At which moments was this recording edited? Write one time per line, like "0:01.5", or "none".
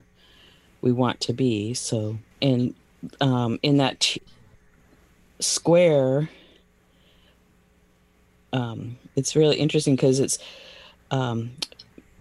0:02.3
0:09.1